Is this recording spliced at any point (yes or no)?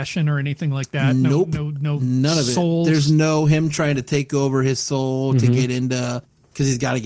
no